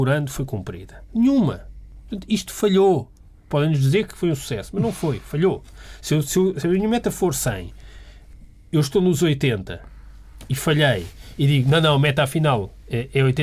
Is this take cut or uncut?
uncut